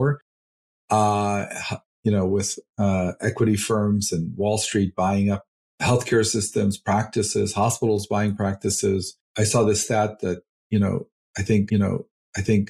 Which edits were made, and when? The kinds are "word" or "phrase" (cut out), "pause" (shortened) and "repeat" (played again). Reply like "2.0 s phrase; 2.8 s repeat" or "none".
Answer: 5.7 s pause; 9.2 s pause; 11.7 s repeat